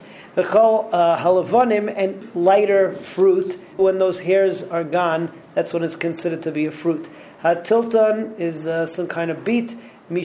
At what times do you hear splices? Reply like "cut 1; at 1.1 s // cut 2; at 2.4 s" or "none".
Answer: cut 1; at 2.2 s // cut 2; at 3.8 s